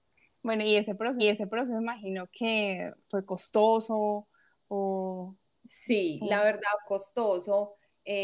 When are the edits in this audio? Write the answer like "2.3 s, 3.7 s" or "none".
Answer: 1.2 s, 3.0 s, 5.4 s, 6.8 s